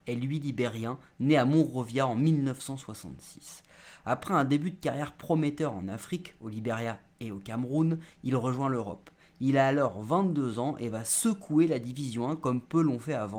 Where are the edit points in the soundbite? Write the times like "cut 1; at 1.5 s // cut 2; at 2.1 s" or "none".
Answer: none